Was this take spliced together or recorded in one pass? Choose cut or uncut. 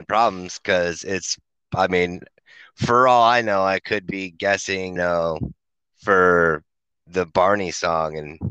cut